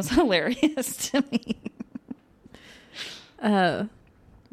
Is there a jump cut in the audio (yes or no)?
no